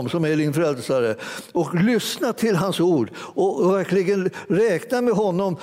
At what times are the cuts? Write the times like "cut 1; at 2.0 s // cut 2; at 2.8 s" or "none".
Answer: none